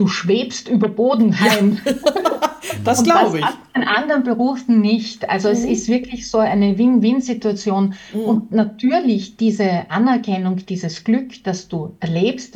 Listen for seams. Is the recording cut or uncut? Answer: uncut